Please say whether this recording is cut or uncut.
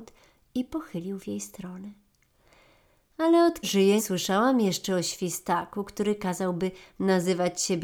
cut